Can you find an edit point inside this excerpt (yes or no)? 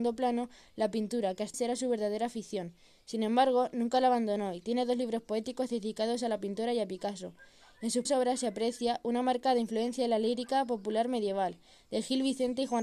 yes